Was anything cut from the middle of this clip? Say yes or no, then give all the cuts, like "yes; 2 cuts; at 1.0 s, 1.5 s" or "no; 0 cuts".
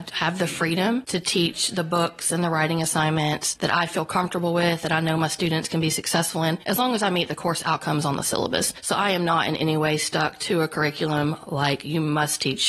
no; 0 cuts